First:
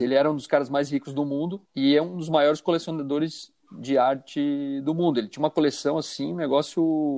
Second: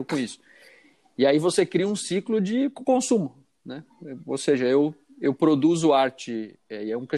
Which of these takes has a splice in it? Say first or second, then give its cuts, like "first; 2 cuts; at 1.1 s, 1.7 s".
first; 2 cuts; at 1.6 s, 3.6 s